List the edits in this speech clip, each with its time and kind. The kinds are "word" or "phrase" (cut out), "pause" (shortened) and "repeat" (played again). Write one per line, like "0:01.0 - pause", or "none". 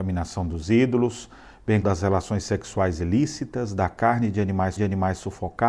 0:01.8 - word
0:04.8 - repeat